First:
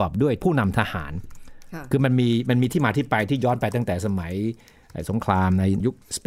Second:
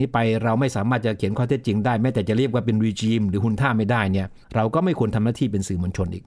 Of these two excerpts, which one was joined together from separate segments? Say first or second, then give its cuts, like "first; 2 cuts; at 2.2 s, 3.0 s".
second; 1 cut; at 4.4 s